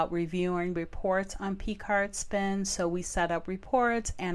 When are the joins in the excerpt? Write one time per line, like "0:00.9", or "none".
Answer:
none